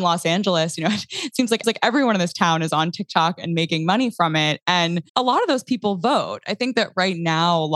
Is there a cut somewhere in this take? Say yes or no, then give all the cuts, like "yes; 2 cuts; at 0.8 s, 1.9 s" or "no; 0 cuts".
yes; 2 cuts; at 1.6 s, 5.1 s